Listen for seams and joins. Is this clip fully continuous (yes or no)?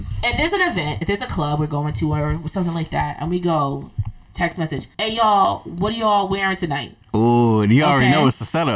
no